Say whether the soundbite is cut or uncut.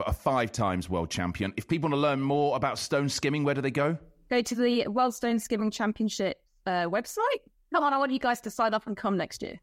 uncut